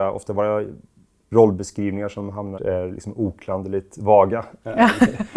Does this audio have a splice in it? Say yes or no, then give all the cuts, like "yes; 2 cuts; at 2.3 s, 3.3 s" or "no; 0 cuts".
yes; 1 cut; at 2.6 s